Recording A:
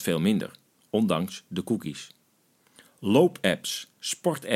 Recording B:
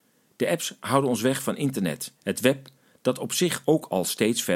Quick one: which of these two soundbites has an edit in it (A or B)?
B